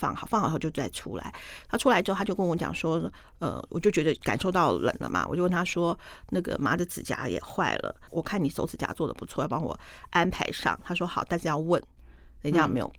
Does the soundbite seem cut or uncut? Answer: uncut